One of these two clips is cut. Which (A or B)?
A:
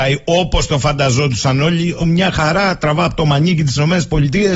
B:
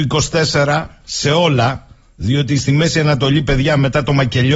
A